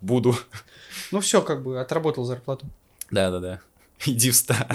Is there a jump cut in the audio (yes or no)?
no